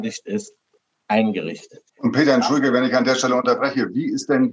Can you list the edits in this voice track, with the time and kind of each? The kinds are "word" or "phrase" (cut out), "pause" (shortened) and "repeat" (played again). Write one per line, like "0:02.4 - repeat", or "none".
0:01.9 - pause